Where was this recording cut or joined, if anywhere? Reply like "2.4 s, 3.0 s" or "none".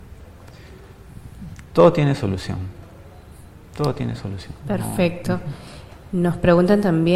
4.6 s